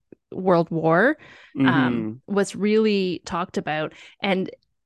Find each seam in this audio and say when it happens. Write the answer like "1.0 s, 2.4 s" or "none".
none